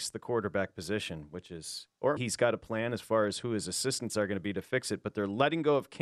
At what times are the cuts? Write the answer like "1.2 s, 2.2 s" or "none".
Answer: 2.2 s

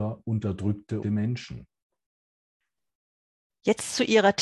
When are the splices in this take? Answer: 1.0 s

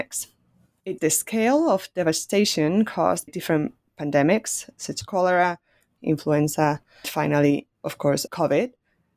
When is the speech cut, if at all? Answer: 1.0 s, 3.3 s, 5.0 s, 6.0 s, 7.0 s, 8.3 s

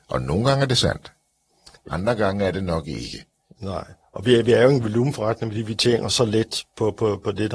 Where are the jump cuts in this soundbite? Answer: none

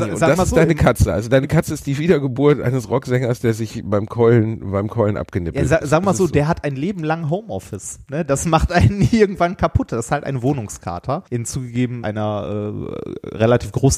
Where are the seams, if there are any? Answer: 11.3 s, 12.0 s

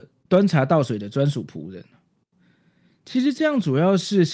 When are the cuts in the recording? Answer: none

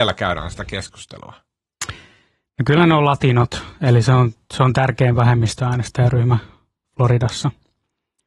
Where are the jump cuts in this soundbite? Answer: none

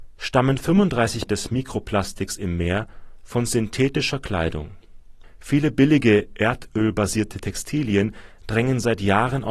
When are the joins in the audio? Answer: 1.3 s

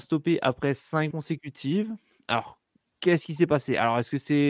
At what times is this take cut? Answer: 1.1 s

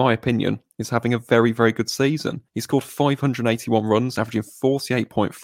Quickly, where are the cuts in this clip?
2.5 s

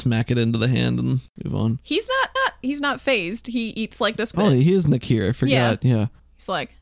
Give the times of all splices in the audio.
1.3 s, 2.4 s, 4.3 s

